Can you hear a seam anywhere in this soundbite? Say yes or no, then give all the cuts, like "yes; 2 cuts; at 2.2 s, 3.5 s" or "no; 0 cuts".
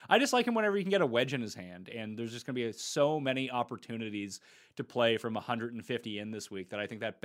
no; 0 cuts